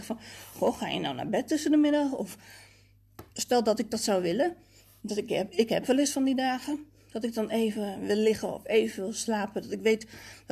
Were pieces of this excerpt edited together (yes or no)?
no